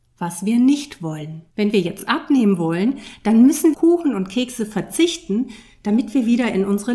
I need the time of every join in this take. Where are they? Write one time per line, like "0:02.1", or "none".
0:01.5
0:03.7